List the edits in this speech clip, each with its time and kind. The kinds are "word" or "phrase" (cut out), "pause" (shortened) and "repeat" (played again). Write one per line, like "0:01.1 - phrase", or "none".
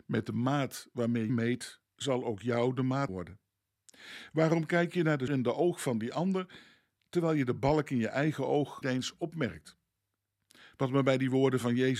0:01.3 - word
0:03.1 - word
0:05.3 - word
0:08.8 - word